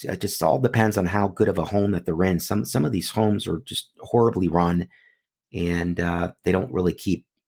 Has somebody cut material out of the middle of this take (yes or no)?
no